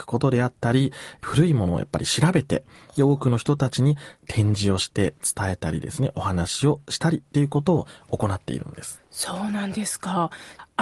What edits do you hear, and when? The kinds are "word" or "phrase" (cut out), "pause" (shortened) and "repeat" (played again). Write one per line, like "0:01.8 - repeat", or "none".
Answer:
0:04.2 - pause